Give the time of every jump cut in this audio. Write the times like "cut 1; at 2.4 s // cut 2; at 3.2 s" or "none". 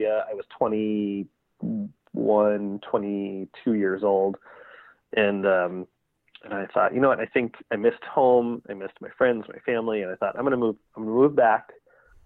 none